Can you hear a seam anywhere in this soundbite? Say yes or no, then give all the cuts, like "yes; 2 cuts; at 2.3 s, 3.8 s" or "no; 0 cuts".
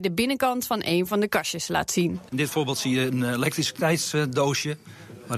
no; 0 cuts